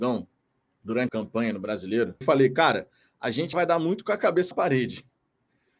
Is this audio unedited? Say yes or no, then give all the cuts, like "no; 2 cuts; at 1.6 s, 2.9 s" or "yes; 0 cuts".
no; 4 cuts; at 1.1 s, 2.2 s, 3.5 s, 4.5 s